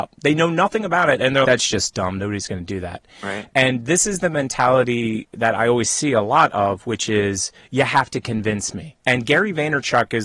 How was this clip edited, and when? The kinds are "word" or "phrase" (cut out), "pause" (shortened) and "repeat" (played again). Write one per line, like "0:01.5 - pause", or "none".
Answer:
0:01.4 - word
0:09.0 - pause